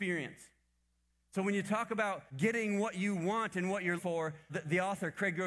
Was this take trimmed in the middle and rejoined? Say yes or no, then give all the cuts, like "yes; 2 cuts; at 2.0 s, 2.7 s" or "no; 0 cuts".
yes; 3 cuts; at 2.3 s, 4.0 s, 4.5 s